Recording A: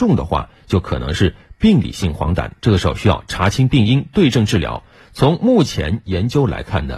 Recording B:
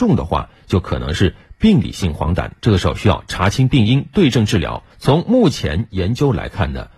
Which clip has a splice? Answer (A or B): B